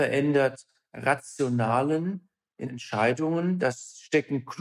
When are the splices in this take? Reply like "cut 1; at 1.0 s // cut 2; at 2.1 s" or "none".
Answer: cut 1; at 2.7 s